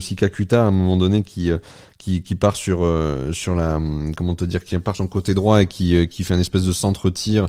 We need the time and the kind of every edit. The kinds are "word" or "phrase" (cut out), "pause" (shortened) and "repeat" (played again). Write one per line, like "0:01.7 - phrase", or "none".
0:04.9 - word